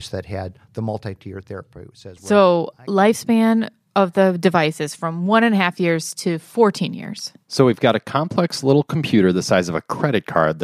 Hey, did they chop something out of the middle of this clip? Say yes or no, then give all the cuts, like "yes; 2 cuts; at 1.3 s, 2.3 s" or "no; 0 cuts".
no; 0 cuts